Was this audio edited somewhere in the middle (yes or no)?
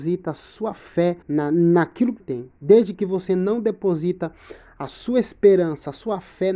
yes